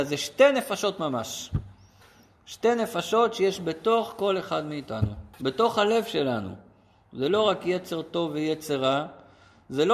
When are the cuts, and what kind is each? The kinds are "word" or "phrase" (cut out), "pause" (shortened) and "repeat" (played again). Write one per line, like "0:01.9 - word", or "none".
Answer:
0:05.3 - pause